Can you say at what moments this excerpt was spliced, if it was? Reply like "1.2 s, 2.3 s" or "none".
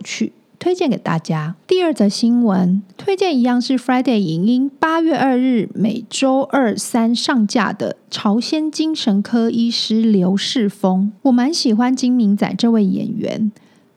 1.6 s, 2.9 s, 11.2 s